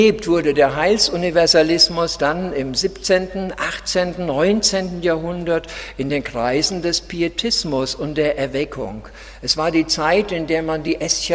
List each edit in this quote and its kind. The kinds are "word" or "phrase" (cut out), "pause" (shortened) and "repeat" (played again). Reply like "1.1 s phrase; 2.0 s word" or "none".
none

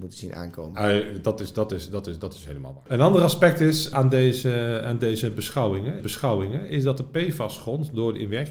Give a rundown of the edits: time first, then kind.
6.0 s repeat

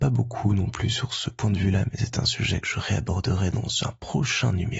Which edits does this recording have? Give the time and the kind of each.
none

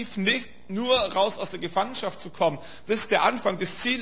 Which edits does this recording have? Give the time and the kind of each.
none

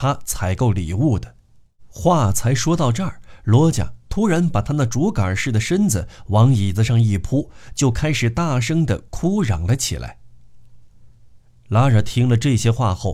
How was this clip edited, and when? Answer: none

